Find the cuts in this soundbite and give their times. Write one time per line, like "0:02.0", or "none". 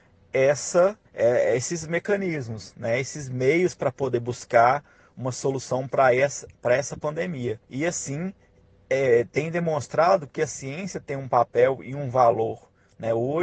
0:01.1
0:07.6